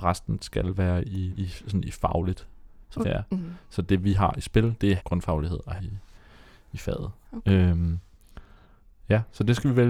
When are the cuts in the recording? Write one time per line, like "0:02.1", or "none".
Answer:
0:01.3
0:03.0
0:05.0
0:05.8

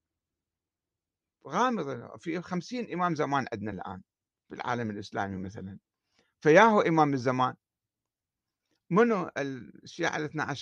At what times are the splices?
none

